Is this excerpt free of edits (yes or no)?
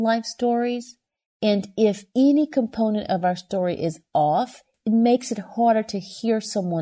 yes